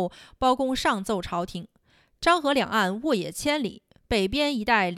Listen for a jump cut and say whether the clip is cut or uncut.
uncut